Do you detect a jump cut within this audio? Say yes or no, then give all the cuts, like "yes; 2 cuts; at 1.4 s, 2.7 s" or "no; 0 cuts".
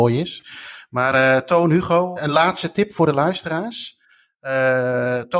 yes; 1 cut; at 2.2 s